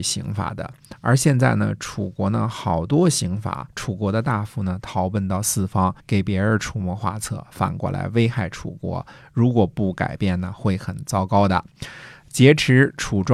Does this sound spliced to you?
yes; 2 cuts; at 3.7 s, 6.0 s

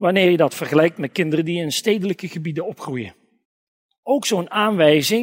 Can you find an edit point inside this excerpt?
no; 0 cuts

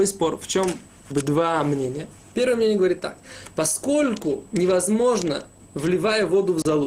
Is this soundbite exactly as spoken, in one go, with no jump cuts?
no; 1 cut; at 1.1 s

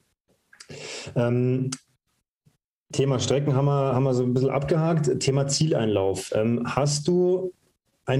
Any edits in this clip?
no; 0 cuts

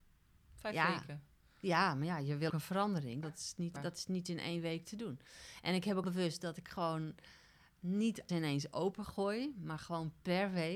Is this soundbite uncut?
no; 5 cuts; at 2.5 s, 3.2 s, 3.8 s, 6.0 s, 8.3 s

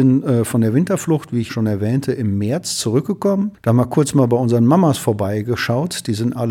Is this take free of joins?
no; 2 cuts; at 1.5 s, 3.5 s

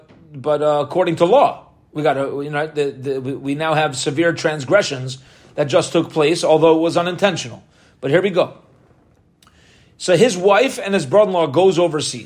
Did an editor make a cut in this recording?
no; 0 cuts

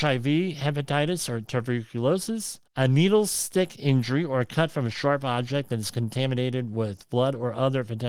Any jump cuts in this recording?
yes; 1 cut; at 2.7 s

